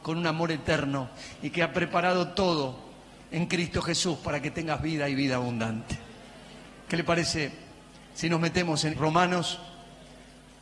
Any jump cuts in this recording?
yes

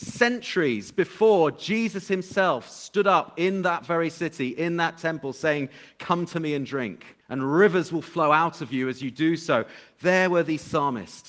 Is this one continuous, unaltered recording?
no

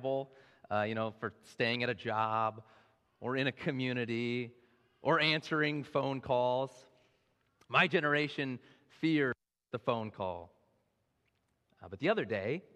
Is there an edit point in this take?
no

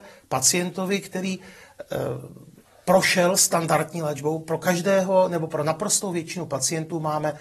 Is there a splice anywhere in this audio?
no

